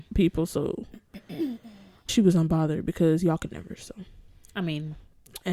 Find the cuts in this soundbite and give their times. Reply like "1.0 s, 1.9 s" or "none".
2.1 s